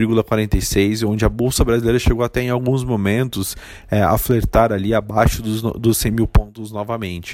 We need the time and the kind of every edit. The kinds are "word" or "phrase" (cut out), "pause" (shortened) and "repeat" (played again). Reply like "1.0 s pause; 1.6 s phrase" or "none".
none